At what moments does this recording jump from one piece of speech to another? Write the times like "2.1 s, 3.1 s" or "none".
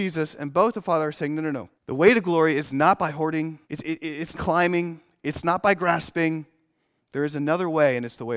1.8 s, 3.6 s, 4.3 s